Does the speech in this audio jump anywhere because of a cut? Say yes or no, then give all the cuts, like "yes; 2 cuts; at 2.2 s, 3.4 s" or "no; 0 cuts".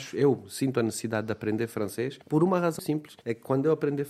yes; 3 cuts; at 2.2 s, 2.8 s, 3.2 s